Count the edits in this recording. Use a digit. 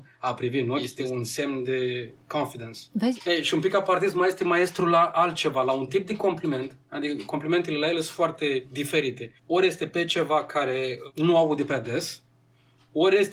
1